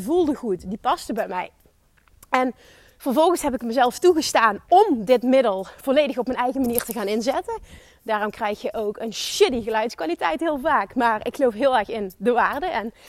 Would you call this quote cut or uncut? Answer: uncut